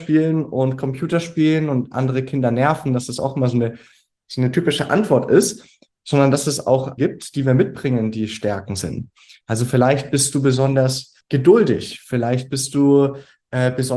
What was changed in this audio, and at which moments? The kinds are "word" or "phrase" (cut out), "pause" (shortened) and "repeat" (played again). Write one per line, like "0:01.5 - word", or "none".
0:07.0 - word
0:11.2 - pause